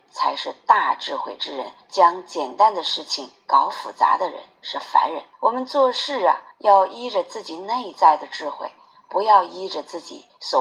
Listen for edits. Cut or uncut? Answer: cut